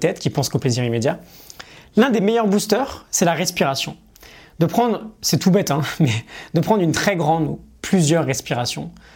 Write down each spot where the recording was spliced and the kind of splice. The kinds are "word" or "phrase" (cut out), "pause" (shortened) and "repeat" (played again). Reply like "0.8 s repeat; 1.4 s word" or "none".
none